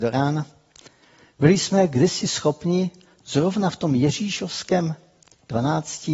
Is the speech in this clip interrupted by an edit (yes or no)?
no